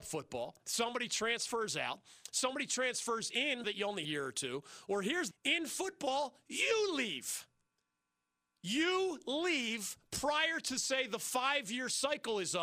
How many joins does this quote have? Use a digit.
3